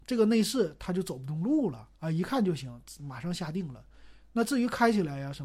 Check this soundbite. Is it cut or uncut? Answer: cut